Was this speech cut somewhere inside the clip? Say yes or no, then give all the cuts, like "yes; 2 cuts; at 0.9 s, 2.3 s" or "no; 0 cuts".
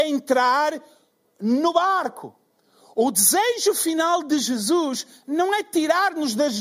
no; 0 cuts